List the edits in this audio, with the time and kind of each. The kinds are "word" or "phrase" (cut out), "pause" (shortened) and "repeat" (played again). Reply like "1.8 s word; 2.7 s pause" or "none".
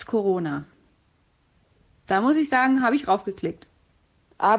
none